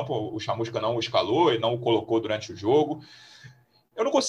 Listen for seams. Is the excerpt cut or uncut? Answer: uncut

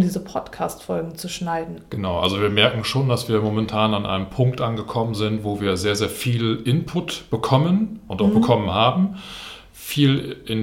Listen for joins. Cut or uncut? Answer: uncut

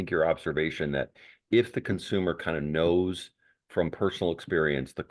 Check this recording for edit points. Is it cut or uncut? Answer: uncut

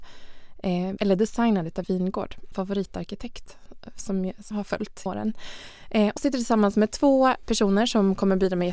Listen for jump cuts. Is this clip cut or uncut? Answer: cut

